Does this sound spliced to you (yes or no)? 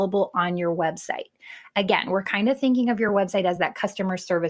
no